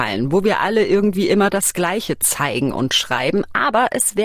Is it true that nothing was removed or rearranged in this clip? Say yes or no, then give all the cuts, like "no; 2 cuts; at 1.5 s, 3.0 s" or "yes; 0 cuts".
yes; 0 cuts